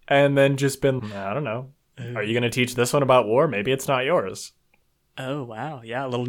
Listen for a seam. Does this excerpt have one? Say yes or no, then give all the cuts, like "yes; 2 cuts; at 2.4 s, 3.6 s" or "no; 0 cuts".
yes; 1 cut; at 1.0 s